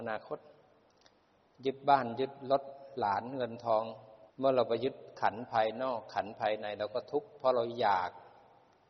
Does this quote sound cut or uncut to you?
cut